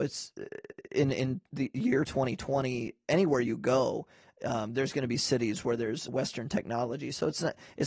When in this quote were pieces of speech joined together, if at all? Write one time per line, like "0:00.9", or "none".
0:06.1